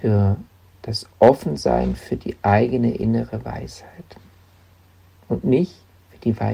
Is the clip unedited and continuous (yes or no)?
yes